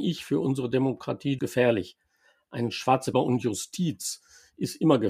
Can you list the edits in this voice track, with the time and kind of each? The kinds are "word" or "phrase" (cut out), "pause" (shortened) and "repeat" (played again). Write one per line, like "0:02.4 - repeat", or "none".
0:01.4 - word
0:03.1 - phrase